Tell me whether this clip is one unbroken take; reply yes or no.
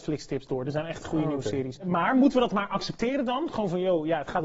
yes